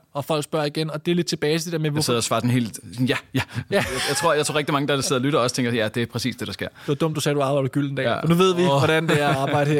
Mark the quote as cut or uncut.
uncut